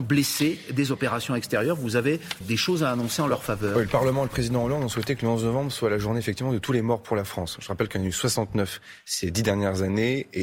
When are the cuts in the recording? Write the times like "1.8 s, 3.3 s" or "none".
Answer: 2.4 s